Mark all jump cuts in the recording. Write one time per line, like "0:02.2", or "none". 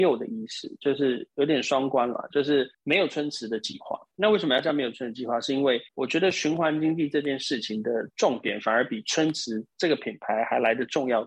0:02.7
0:05.9
0:08.1